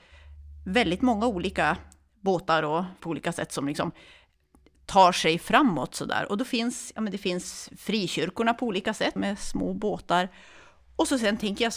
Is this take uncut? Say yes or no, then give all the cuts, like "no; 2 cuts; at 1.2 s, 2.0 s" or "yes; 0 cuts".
no; 2 cuts; at 3.0 s, 9.2 s